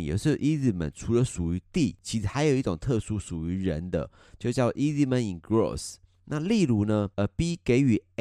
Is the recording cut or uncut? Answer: uncut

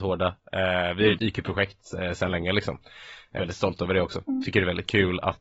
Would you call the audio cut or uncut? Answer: cut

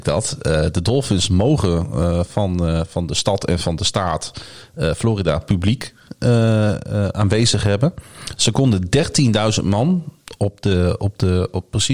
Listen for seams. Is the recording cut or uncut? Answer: uncut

